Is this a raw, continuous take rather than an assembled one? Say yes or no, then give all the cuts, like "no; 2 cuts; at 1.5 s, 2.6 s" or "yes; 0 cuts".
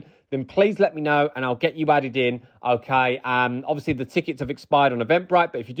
yes; 0 cuts